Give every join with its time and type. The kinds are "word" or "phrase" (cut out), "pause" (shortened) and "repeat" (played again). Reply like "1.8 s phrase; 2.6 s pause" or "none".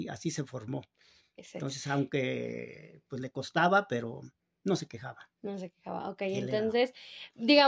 none